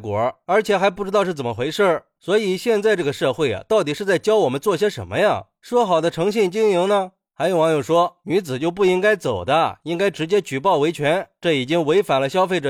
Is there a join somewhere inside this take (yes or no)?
no